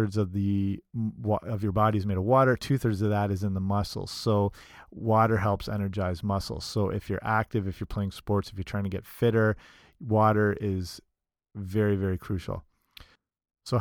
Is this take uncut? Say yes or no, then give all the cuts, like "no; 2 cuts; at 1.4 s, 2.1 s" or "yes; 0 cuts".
yes; 0 cuts